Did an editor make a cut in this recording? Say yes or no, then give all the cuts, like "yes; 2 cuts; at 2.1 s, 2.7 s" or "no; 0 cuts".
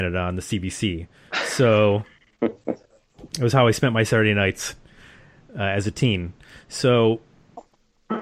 no; 0 cuts